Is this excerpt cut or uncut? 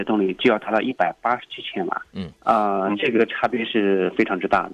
cut